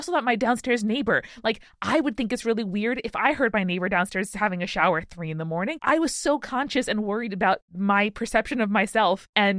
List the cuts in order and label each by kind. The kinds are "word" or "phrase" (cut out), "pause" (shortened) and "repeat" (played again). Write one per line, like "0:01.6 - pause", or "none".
none